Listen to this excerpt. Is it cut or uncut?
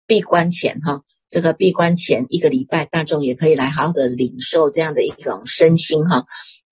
uncut